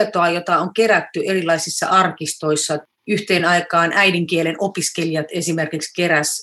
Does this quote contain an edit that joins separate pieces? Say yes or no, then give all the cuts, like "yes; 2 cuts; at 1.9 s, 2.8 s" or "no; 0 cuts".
no; 0 cuts